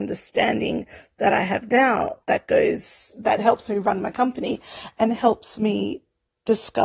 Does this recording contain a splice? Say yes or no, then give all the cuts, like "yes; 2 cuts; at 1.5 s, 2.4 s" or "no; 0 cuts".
yes; 1 cut; at 2.2 s